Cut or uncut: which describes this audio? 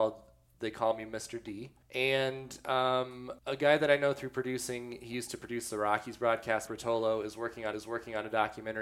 cut